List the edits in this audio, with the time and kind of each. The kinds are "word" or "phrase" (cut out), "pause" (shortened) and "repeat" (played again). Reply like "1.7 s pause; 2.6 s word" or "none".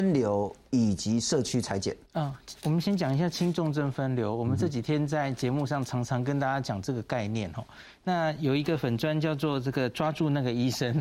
2.1 s pause